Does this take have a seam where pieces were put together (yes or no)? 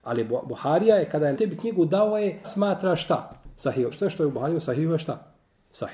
yes